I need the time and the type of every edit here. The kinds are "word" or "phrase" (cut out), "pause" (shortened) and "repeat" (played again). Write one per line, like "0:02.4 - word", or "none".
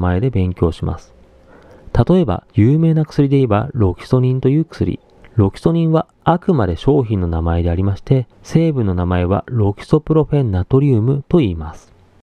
0:02.5 - pause
0:05.2 - pause
0:08.3 - pause